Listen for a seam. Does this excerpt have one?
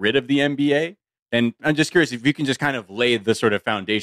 no; 0 cuts

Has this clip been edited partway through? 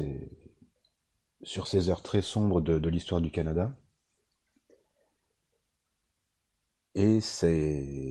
no; 0 cuts

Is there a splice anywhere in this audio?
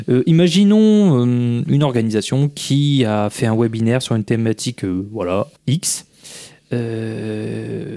yes; 1 cut; at 5.6 s

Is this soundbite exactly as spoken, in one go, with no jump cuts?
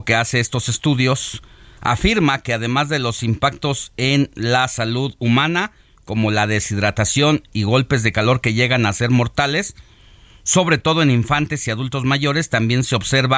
yes; 0 cuts

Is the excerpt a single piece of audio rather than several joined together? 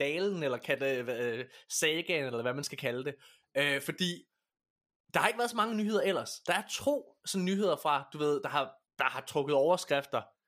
yes; 0 cuts

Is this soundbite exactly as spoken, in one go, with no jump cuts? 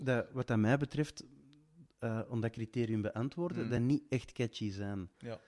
yes; 0 cuts

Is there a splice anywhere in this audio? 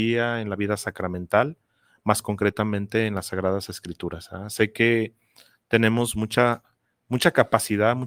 no; 0 cuts

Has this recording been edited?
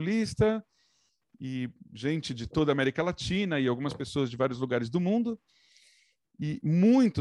no; 0 cuts

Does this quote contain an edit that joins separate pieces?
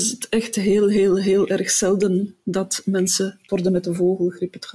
yes; 1 cut; at 3.5 s

